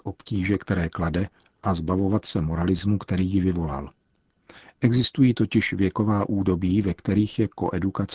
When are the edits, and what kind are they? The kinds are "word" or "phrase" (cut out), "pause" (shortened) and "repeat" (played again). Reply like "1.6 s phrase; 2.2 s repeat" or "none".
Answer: none